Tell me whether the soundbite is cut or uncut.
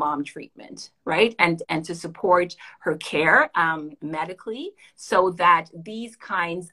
uncut